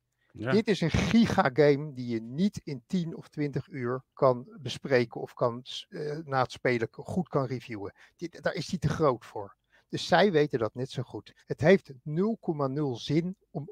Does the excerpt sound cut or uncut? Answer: cut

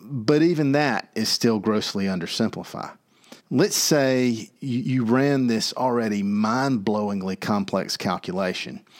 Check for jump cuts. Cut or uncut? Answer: cut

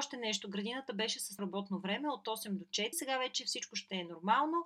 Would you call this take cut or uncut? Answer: cut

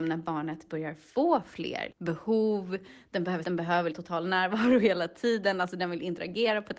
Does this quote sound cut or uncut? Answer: cut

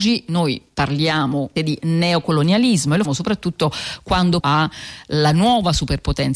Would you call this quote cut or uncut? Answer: cut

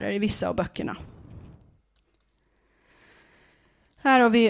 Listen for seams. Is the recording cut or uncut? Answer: uncut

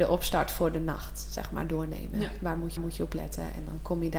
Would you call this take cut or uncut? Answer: cut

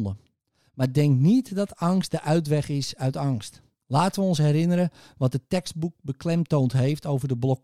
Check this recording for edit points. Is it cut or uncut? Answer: uncut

